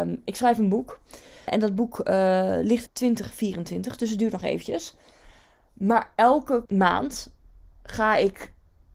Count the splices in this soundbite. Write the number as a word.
one